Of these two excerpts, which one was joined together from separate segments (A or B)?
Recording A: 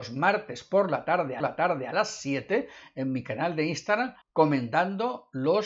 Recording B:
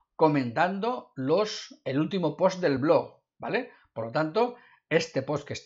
A